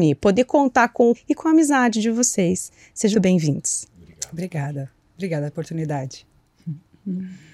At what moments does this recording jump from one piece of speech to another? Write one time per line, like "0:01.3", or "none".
0:01.1
0:03.1
0:05.5